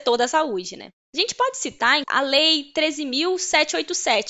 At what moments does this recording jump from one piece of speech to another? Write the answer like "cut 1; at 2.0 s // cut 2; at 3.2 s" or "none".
cut 1; at 2.0 s